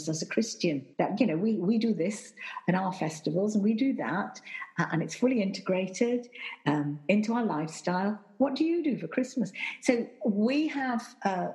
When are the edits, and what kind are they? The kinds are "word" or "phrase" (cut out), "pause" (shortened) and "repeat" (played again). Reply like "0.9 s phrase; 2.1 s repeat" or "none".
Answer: 0.9 s pause